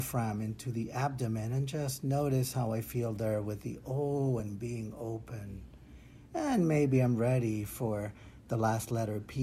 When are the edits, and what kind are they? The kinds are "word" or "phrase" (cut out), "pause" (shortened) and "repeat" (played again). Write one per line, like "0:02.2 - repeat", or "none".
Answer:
none